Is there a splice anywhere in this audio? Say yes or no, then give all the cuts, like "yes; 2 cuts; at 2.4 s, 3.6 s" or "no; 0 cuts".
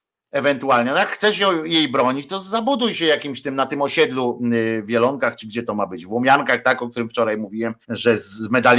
yes; 1 cut; at 7.8 s